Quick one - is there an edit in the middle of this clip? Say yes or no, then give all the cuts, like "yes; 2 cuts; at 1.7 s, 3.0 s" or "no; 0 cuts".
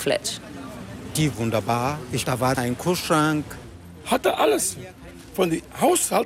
yes; 3 cuts; at 1.3 s, 2.2 s, 2.6 s